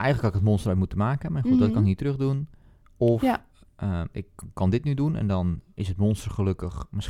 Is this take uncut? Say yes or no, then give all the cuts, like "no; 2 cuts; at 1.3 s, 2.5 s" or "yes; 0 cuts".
yes; 0 cuts